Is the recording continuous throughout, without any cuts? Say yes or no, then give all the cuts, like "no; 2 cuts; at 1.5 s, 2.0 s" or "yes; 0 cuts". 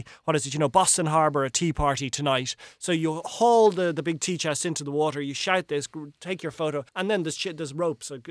no; 1 cut; at 6.9 s